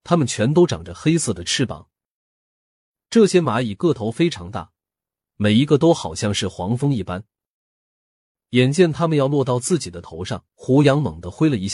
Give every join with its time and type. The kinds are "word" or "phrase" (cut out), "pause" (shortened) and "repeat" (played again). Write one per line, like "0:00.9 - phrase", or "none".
0:10.5 - pause